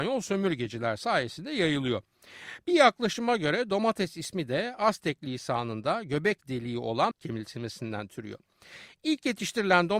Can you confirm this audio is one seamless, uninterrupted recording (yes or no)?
no